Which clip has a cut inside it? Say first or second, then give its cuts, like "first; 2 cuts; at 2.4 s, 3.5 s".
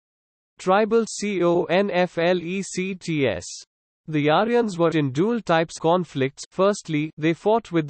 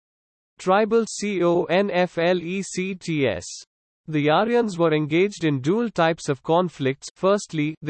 first; 2 cuts; at 4.9 s, 5.8 s